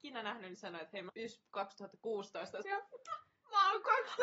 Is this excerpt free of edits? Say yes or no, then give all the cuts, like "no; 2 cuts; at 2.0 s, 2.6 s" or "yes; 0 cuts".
no; 2 cuts; at 1.1 s, 2.6 s